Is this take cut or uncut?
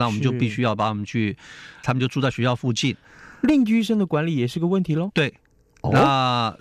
cut